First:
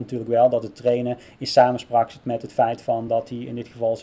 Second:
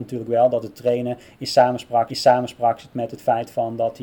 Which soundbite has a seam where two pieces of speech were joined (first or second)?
second